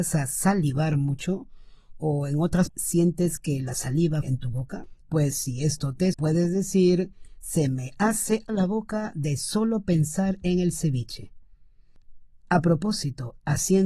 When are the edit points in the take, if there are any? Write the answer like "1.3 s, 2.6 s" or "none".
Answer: 2.7 s, 4.2 s, 5.0 s, 6.1 s, 8.5 s